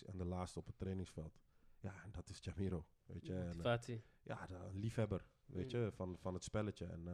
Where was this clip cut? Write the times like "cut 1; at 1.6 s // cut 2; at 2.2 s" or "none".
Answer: none